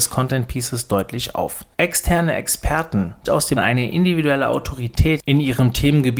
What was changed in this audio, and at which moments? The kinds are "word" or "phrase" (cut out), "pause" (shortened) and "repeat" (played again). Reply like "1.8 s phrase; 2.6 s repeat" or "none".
1.7 s pause; 3.3 s phrase; 3.6 s phrase